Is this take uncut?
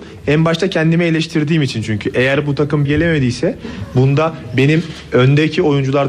no; 1 cut; at 2.9 s

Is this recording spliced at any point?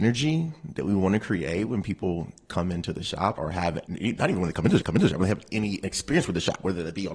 yes; 3 cuts; at 3.3 s, 3.8 s, 4.8 s

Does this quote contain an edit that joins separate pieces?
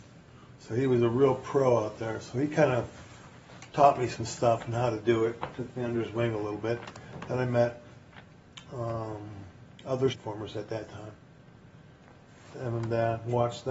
yes; 2 cuts; at 10.1 s, 12.5 s

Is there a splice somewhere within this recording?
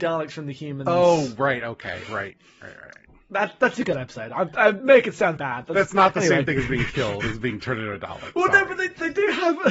yes; 1 cut; at 5.4 s

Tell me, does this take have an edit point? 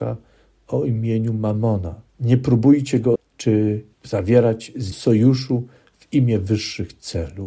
yes; 4 cuts; at 2.1 s, 3.2 s, 3.9 s, 4.9 s

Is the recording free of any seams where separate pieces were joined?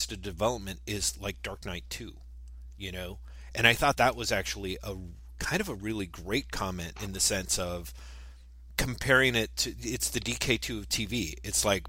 no; 1 cut; at 3.9 s

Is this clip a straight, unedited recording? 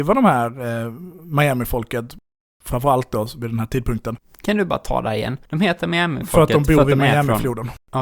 no; 1 cut; at 5.4 s

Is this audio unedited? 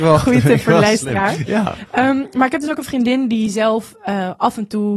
yes; 0 cuts

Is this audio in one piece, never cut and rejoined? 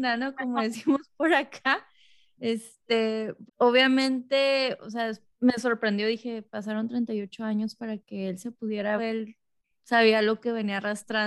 no; 3 cuts; at 3.5 s, 5.3 s, 9.0 s

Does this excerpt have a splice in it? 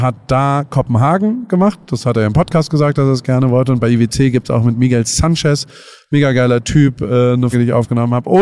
yes; 1 cut; at 7.5 s

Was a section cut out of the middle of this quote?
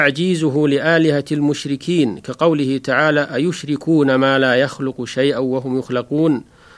no; 0 cuts

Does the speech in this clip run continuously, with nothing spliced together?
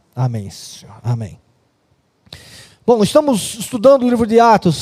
yes; 0 cuts

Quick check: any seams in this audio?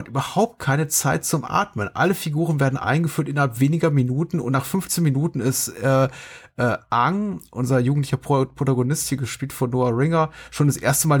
no; 0 cuts

